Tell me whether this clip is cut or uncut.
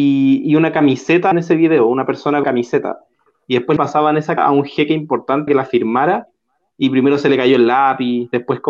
cut